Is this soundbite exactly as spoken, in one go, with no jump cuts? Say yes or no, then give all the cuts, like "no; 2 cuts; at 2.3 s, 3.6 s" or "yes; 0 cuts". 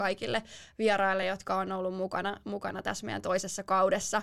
yes; 0 cuts